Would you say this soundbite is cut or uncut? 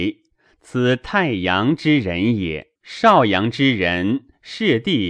cut